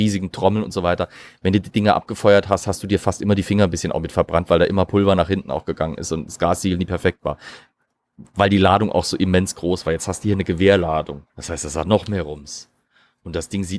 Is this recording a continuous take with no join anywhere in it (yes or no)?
no